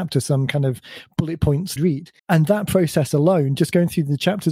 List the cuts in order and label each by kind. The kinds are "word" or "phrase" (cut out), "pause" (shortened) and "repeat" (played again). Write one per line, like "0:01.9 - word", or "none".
0:01.8 - phrase
0:02.2 - pause